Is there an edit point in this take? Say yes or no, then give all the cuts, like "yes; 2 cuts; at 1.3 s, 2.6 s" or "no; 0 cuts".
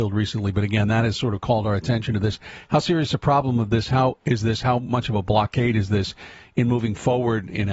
no; 0 cuts